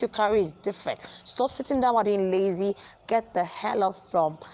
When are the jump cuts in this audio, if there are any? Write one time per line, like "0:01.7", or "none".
0:02.0